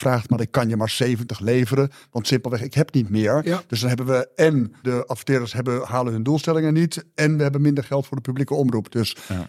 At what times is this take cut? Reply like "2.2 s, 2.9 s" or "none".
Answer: 4.8 s

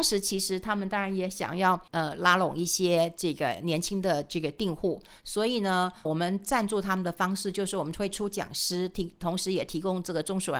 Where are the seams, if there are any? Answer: 1.9 s, 6.1 s

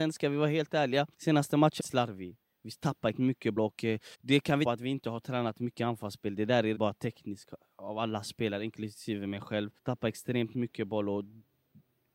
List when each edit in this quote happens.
1.1 s, 1.8 s, 3.1 s, 3.6 s, 4.1 s, 4.6 s, 6.7 s, 9.8 s

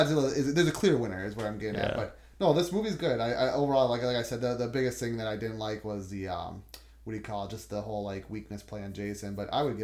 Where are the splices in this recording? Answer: none

